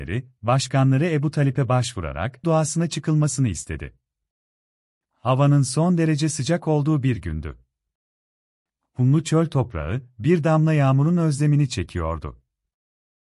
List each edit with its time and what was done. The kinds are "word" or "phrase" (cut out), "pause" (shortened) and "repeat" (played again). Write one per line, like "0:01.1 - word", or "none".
0:02.4 - word